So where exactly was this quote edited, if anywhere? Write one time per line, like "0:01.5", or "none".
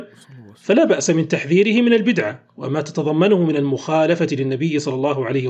none